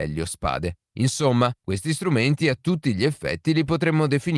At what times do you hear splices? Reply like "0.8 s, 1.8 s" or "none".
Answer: none